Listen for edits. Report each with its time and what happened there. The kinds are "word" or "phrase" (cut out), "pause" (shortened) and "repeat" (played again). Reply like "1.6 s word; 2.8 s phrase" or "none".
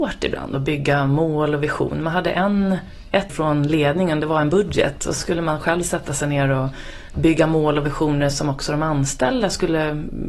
3.3 s word; 5.2 s word